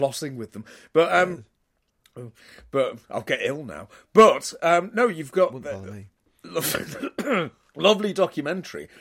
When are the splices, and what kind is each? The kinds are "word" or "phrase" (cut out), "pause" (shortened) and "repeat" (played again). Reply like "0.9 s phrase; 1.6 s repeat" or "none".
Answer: 7.7 s pause